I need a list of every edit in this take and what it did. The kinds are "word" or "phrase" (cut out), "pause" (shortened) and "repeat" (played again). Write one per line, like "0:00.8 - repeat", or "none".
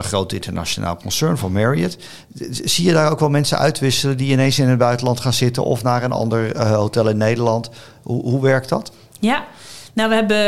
none

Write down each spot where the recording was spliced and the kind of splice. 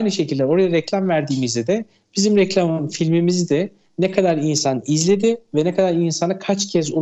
none

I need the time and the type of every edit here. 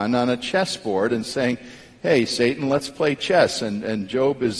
none

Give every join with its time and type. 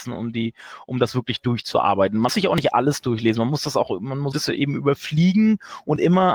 0:02.3 - word
0:04.3 - word

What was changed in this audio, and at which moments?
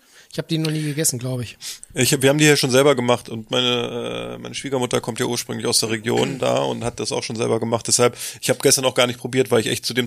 none

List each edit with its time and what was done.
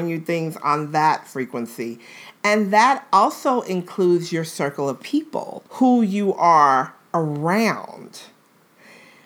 0:05.7 - pause

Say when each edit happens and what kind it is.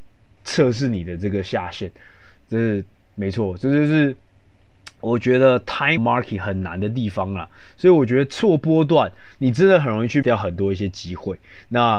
0:06.0 - word
0:10.2 - word

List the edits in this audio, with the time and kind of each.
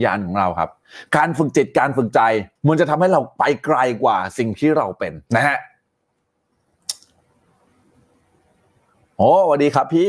0:02.6 - pause
0:05.3 - pause

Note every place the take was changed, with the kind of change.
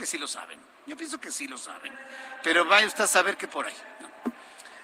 0:03.5 - phrase

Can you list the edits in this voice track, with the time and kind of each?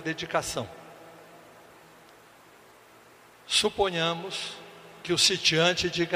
none

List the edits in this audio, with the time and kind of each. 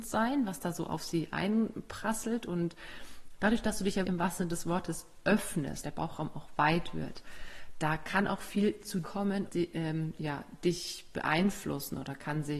0:04.0 - word
0:05.8 - word
0:09.0 - word
0:09.5 - word

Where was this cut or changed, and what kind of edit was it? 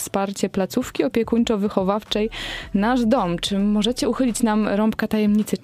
none

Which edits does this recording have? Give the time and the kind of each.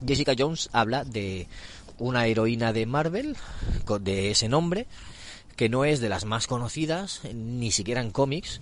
none

